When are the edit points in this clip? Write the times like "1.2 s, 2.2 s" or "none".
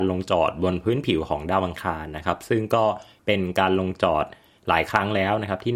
none